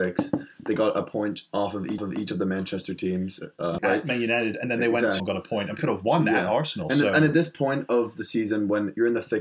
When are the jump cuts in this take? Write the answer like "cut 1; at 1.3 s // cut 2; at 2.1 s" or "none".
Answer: cut 1; at 2.0 s // cut 2; at 3.8 s // cut 3; at 5.2 s // cut 4; at 5.8 s